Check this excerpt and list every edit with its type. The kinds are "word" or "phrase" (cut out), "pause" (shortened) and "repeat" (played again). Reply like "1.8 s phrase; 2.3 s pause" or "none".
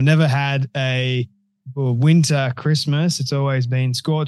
none

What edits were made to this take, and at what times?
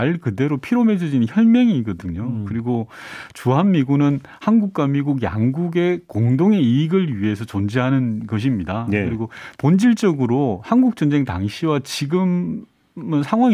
none

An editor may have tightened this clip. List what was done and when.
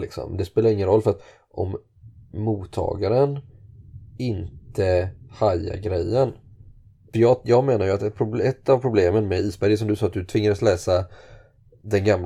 none

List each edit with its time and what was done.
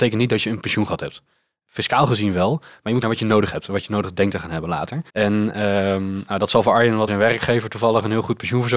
3.0 s word; 5.1 s pause; 7.1 s phrase

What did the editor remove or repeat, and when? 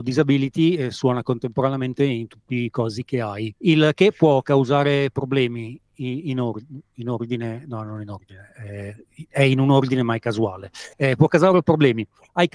3.6 s pause; 10.9 s pause

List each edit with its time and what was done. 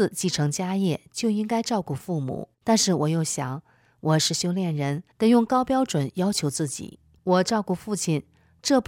2.5 s pause; 5.1 s pause; 7.1 s pause

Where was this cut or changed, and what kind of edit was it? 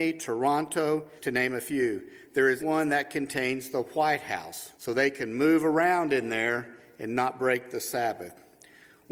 1.2 s pause; 2.6 s word; 4.7 s pause

